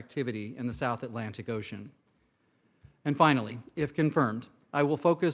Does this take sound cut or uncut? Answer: uncut